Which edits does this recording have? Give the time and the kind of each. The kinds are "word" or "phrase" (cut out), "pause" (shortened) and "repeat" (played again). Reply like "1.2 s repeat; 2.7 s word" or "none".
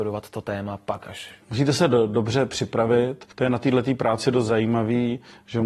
1.4 s pause; 3.3 s pause